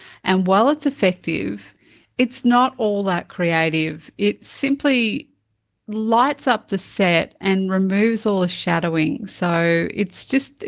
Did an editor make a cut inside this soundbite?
no; 0 cuts

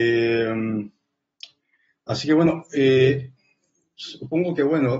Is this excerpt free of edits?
yes; 0 cuts

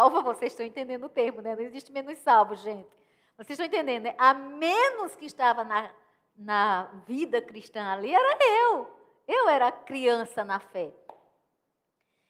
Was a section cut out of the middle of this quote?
no; 0 cuts

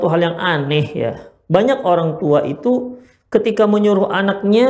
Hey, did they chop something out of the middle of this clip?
no; 0 cuts

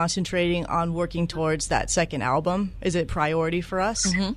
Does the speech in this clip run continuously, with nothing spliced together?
yes; 0 cuts

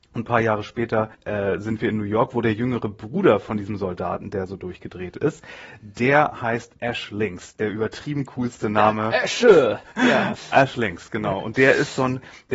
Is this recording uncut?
no; 1 cut; at 1.1 s

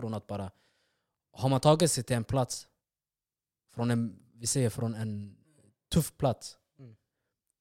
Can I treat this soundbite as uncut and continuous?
yes; 0 cuts

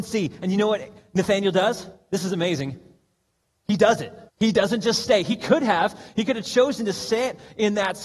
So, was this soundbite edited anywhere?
yes; 1 cut; at 4.3 s

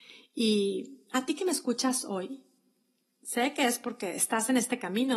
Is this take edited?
no; 0 cuts

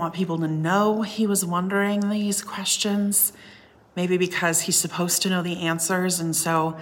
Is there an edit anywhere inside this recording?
no; 0 cuts

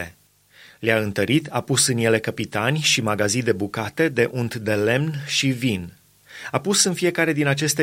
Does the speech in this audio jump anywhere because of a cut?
no; 0 cuts

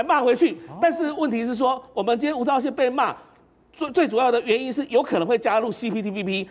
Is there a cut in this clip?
no; 0 cuts

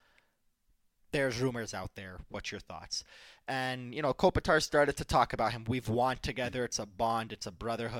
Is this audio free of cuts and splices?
yes; 0 cuts

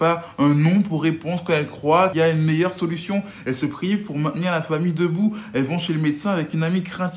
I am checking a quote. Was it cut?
yes; 1 cut; at 2.1 s

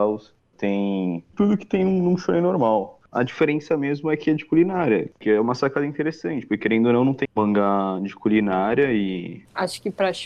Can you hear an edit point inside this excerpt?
yes; 2 cuts; at 3.1 s, 7.2 s

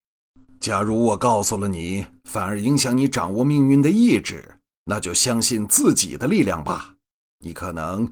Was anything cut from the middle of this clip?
no; 0 cuts

